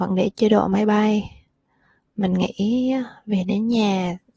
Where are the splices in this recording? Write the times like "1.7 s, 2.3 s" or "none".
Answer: none